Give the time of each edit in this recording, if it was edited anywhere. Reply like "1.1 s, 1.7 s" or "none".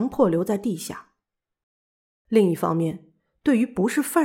none